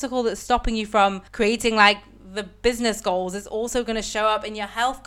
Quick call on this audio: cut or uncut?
cut